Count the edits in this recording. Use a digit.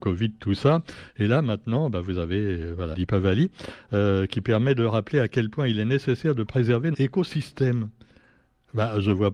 2